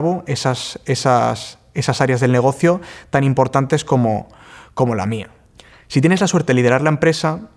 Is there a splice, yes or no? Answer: no